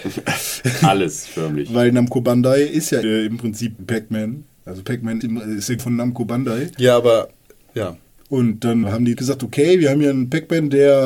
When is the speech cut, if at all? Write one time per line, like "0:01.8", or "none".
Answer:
0:03.0
0:03.8
0:05.2
0:05.8
0:08.8
0:09.1